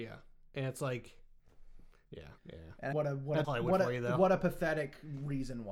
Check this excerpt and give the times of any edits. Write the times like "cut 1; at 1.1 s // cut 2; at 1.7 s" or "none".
cut 1; at 2.4 s // cut 2; at 2.9 s // cut 3; at 3.4 s

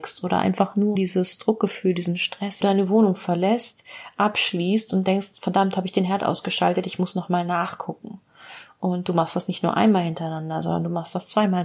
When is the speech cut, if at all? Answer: cut 1; at 1.0 s // cut 2; at 2.6 s

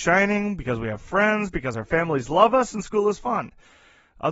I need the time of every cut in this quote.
none

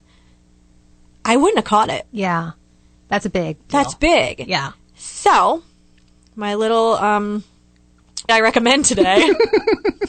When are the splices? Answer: cut 1; at 8.3 s

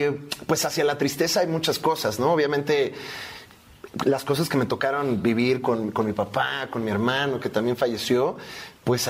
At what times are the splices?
none

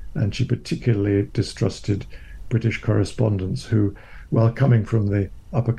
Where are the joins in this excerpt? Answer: none

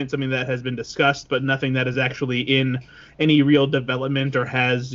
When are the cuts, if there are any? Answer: none

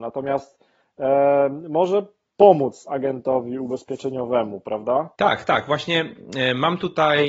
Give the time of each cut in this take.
cut 1; at 5.1 s

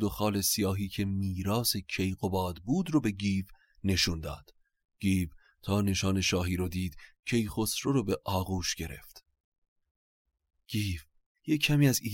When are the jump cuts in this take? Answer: none

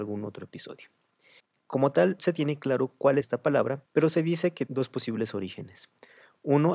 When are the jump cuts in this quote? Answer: cut 1; at 1.4 s // cut 2; at 2.2 s // cut 3; at 3.2 s // cut 4; at 3.9 s // cut 5; at 4.7 s

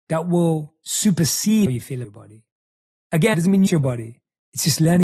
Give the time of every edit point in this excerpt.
cut 1; at 1.7 s // cut 2; at 2.0 s // cut 3; at 3.3 s // cut 4; at 3.7 s

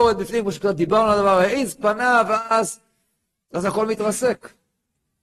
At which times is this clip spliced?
none

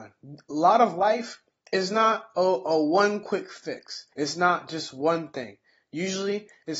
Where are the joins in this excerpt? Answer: cut 1; at 4.1 s

